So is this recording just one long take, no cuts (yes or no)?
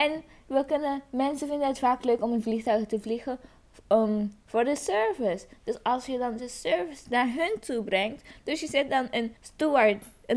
no